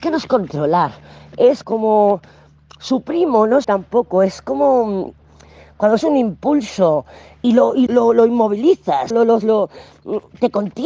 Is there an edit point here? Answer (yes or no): yes